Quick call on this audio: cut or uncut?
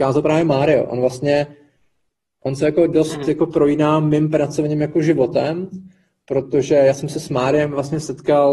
uncut